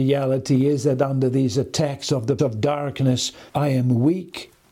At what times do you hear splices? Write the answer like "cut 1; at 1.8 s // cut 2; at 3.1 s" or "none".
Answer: cut 1; at 2.4 s // cut 2; at 3.5 s